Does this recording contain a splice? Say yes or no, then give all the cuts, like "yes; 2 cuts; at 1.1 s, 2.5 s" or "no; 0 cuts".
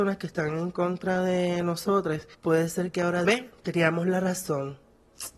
yes; 2 cuts; at 2.3 s, 3.2 s